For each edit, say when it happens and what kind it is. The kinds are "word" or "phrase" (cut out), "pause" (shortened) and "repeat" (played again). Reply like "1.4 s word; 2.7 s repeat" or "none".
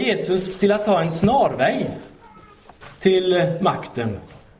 none